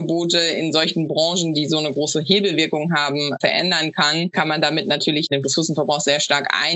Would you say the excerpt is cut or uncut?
uncut